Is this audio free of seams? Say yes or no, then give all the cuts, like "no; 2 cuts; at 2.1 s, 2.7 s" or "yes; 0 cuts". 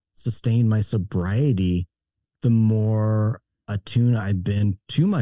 yes; 0 cuts